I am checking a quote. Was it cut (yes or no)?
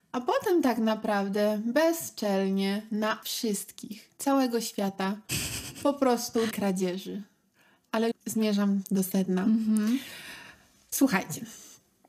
yes